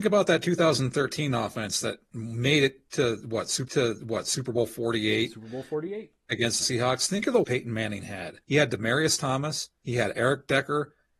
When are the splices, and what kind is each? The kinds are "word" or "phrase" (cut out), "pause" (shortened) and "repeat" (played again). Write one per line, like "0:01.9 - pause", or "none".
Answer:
0:03.7 - repeat
0:06.6 - word
0:07.4 - word
0:08.4 - pause
0:09.8 - pause